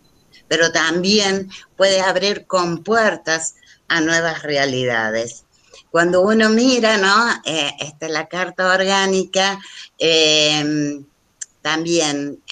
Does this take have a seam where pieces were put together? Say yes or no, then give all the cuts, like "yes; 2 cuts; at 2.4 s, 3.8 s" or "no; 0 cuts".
no; 0 cuts